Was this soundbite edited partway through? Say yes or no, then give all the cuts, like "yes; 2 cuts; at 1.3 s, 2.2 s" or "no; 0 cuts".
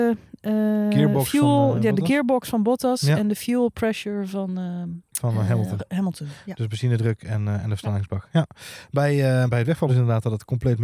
yes; 3 cuts; at 5.1 s, 9.5 s, 9.9 s